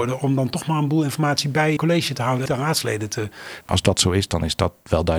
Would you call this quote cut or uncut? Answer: cut